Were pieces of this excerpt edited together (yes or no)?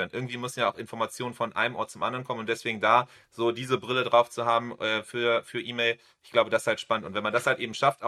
no